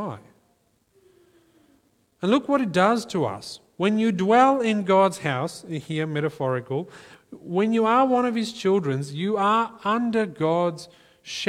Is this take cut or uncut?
uncut